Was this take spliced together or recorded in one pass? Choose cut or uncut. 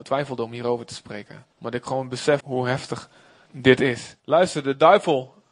cut